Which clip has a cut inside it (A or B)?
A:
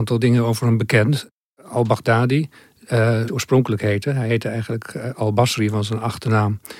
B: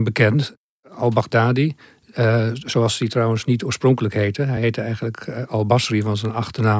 A